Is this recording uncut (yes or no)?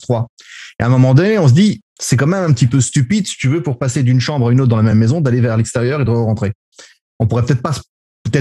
yes